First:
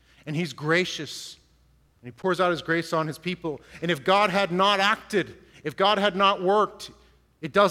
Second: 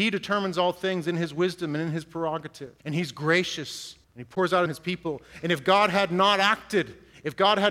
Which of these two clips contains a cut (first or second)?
second